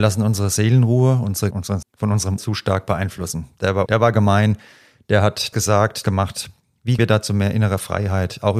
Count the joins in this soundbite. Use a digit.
7